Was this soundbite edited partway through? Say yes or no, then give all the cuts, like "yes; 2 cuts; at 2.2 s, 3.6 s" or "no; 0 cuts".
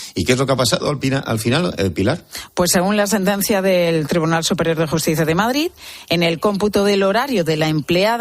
no; 0 cuts